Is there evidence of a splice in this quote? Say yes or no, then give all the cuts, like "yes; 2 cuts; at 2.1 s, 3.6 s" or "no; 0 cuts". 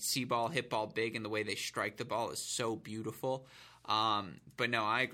no; 0 cuts